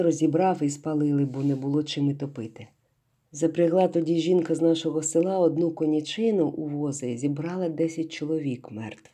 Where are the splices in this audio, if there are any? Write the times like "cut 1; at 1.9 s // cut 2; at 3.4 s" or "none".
none